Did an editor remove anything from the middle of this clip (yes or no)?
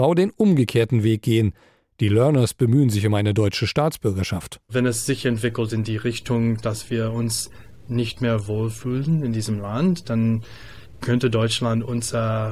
no